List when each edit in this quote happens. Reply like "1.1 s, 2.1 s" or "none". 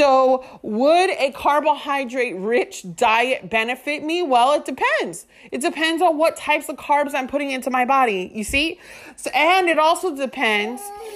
none